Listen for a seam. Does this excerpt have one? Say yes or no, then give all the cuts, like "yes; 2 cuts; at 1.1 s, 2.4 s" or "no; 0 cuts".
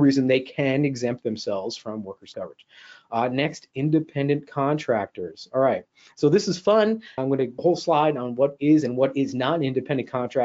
yes; 3 cuts; at 2.3 s, 7.2 s, 7.6 s